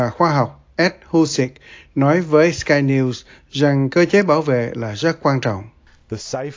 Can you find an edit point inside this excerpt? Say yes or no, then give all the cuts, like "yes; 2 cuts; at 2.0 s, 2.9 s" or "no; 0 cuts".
no; 0 cuts